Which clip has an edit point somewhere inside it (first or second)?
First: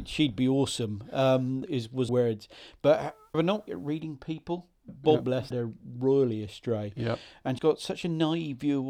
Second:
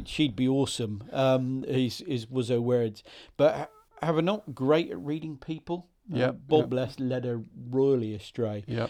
first